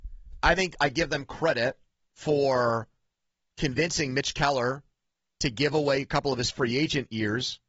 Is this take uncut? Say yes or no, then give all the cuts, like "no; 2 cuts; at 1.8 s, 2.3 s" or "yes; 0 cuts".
yes; 0 cuts